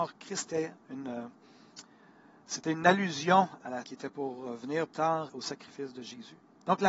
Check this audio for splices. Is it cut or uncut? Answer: cut